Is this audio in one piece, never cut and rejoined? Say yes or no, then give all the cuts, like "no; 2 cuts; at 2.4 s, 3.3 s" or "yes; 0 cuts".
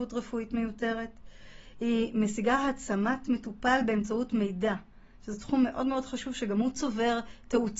yes; 0 cuts